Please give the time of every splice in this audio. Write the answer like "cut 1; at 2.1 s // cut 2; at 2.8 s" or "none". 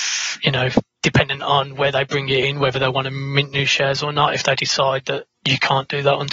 none